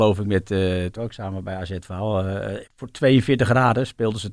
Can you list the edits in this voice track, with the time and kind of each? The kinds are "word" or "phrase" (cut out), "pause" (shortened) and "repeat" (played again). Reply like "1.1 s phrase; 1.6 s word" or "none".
1.0 s word; 2.7 s pause

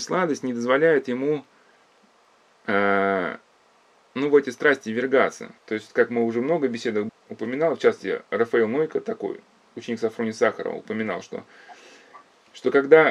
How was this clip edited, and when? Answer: 5.6 s pause; 7.1 s word

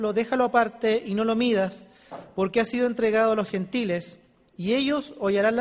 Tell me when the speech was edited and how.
none

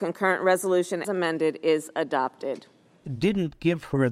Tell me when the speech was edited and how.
1.0 s word

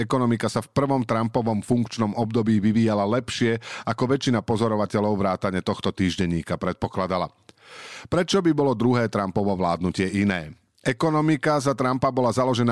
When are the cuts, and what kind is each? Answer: none

